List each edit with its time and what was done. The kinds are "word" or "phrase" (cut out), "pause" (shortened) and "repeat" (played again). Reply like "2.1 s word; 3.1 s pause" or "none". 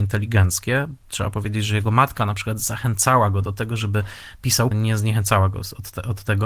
4.7 s word